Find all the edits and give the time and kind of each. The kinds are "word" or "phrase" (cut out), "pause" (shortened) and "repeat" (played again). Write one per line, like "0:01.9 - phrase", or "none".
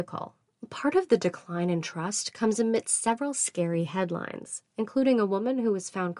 none

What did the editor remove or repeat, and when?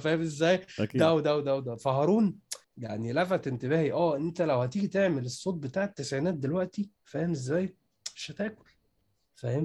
0:02.6 - pause

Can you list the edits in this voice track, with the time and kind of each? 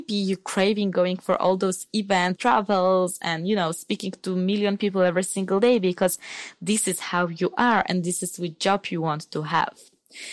0:02.4 - word

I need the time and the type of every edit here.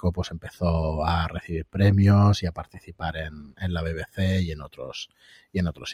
none

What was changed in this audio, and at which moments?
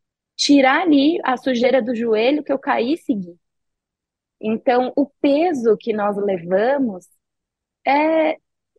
none

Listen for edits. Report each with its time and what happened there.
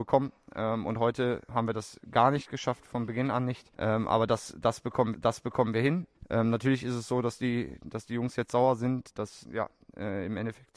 0:01.5 - word
0:03.7 - pause
0:05.1 - repeat
0:09.4 - word

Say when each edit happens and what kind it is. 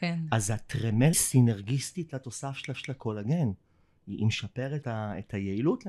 0:01.1 - word
0:02.7 - repeat
0:04.8 - word

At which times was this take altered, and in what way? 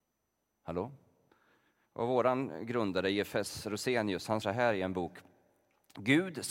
0:01.3 - pause
0:04.4 - word

